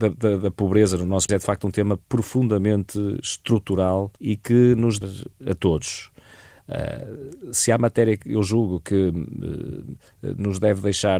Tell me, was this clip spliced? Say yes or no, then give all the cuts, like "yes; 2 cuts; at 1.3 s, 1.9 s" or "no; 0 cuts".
yes; 4 cuts; at 1.3 s, 2.0 s, 4.2 s, 5.0 s